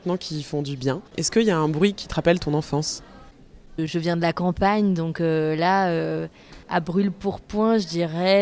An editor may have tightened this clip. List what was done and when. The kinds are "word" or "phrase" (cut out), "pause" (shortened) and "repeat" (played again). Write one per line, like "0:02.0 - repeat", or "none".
0:01.1 - pause
0:06.6 - pause